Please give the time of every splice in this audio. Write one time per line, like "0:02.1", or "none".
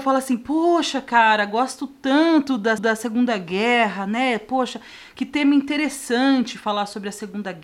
0:02.8